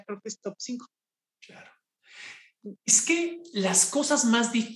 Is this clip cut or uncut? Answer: uncut